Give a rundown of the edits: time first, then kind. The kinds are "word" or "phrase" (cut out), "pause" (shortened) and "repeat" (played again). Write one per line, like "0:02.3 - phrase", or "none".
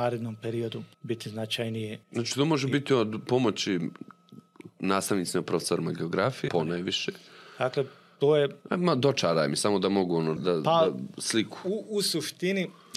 0:00.9 - pause
0:02.0 - pause
0:06.5 - phrase
0:10.4 - word